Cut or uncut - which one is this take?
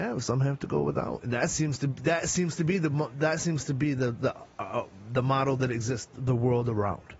uncut